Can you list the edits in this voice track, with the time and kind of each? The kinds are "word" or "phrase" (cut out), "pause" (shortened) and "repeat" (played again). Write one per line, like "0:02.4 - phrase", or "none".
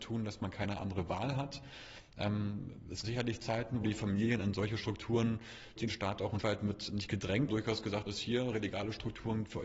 0:03.0 - word
0:03.8 - word
0:05.8 - word
0:06.4 - word
0:07.5 - word
0:08.1 - word